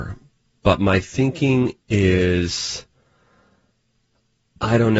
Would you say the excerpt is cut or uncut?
cut